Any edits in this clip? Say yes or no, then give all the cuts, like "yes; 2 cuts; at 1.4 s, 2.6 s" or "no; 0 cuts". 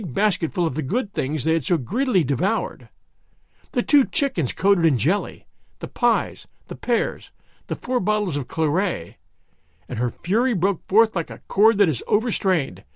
no; 0 cuts